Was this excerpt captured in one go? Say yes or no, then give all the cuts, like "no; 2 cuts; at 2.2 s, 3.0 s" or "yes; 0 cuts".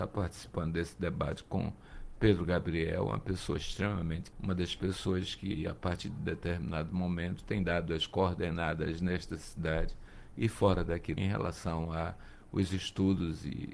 no; 2 cuts; at 4.3 s, 11.2 s